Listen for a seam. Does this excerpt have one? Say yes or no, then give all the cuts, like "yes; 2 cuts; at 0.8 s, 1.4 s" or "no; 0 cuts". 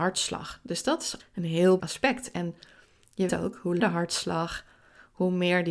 yes; 4 cuts; at 1.2 s, 1.8 s, 3.3 s, 3.8 s